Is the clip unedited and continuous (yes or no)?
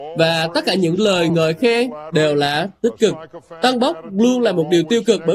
yes